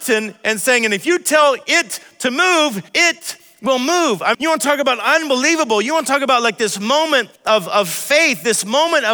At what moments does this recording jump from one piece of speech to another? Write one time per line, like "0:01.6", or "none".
0:02.9
0:04.3
0:07.4

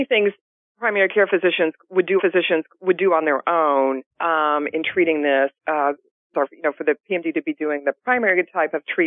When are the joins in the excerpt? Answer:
0:02.2
0:04.1
0:05.6
0:06.3

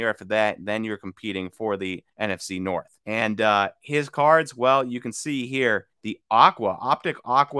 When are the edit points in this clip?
0:02.1
0:03.0
0:05.9

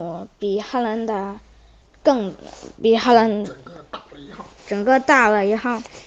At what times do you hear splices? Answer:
0:01.8
0:04.6

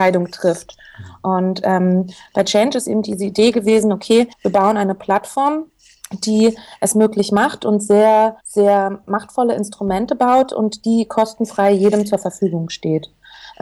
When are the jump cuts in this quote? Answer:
0:04.3
0:08.4

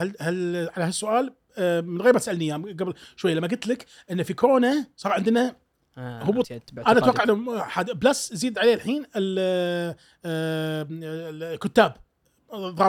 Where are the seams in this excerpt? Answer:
0:06.4

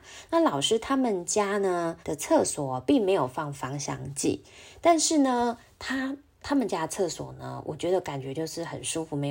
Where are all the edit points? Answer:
0:02.0

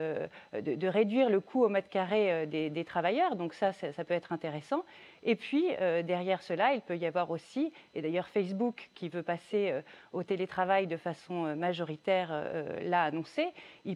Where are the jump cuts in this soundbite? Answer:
none

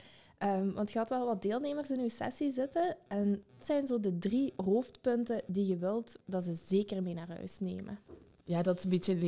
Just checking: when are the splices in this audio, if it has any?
0:03.6

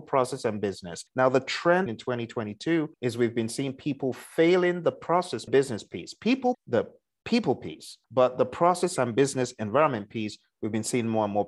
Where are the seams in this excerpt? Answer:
0:01.1
0:01.9
0:02.9
0:05.5
0:06.5
0:08.0

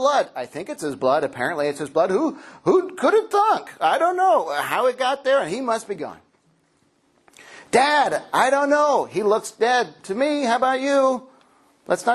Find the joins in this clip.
none

